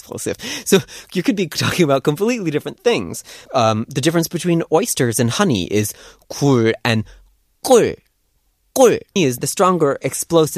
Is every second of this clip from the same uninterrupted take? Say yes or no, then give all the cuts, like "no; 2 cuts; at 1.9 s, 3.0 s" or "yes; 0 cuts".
no; 2 cuts; at 3.5 s, 9.2 s